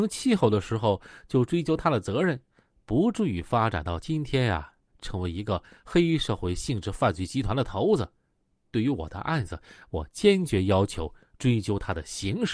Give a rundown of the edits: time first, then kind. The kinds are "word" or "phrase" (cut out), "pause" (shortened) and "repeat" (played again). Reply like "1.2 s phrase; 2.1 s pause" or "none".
none